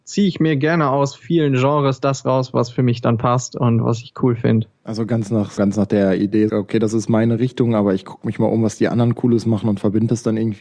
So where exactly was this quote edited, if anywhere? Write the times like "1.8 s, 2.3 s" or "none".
5.6 s, 6.5 s